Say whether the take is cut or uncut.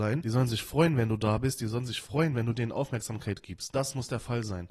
uncut